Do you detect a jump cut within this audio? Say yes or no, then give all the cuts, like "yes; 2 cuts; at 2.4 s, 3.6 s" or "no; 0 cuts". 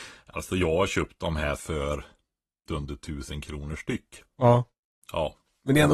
yes; 2 cuts; at 1.6 s, 2.7 s